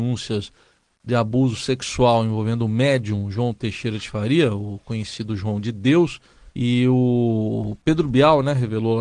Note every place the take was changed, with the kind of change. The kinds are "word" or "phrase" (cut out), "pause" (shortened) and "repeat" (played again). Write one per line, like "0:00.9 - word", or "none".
0:06.5 - pause